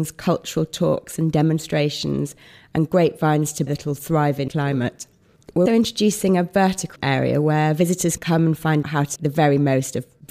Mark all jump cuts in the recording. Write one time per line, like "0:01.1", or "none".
0:03.7
0:04.5
0:05.7
0:07.0
0:08.2
0:08.8
0:09.2